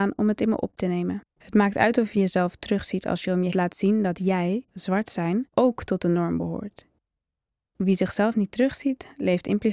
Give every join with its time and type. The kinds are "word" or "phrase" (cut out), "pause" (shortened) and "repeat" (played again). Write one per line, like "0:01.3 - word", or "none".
0:01.3 - pause
0:03.5 - phrase
0:04.7 - phrase
0:05.5 - pause